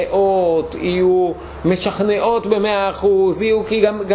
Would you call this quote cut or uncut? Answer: uncut